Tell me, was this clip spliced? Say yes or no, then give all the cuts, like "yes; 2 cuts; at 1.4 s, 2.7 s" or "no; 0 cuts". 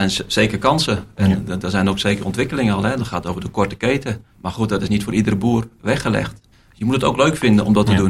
no; 0 cuts